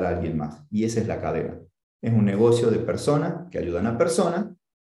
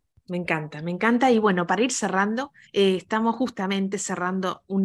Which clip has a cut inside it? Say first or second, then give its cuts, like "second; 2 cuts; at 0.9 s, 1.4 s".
second; 1 cut; at 2.6 s